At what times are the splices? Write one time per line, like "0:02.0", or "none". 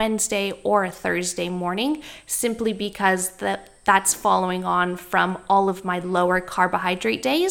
none